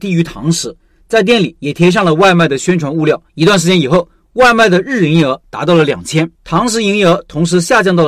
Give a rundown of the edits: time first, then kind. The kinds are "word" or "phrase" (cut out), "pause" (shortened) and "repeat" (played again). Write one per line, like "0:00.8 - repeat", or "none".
0:03.3 - pause
0:06.3 - pause